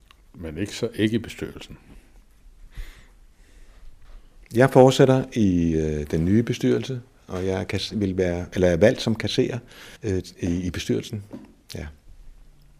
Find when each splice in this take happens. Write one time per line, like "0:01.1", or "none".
0:10.0